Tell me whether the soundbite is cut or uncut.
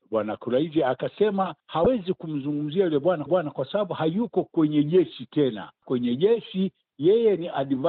cut